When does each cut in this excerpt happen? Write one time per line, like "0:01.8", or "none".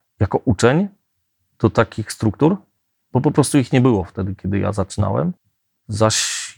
none